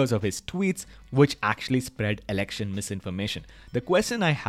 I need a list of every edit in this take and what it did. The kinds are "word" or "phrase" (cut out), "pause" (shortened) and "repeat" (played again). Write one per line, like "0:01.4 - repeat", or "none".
none